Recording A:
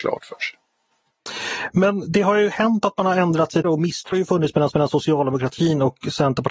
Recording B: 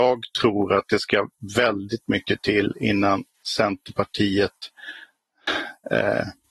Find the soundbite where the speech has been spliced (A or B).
A